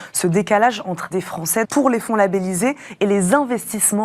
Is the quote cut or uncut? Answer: cut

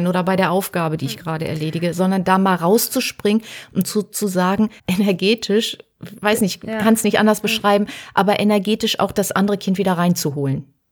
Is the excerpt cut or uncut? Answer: cut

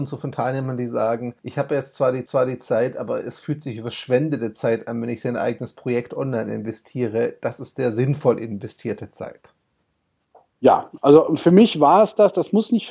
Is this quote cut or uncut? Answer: cut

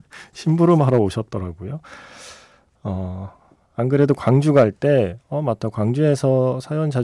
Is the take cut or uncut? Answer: uncut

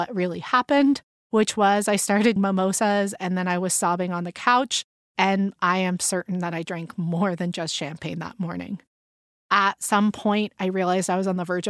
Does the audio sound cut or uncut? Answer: cut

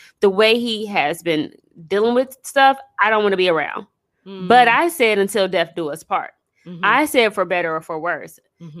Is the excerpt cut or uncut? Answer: uncut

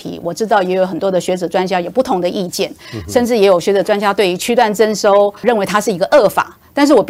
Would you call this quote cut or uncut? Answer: cut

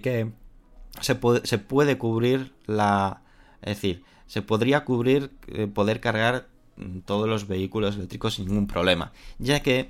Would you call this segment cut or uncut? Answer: uncut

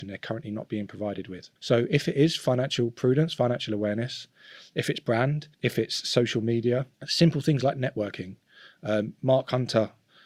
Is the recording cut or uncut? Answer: cut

